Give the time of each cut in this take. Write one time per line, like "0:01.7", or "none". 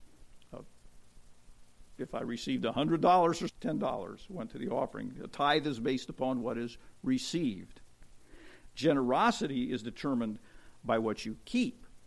0:03.5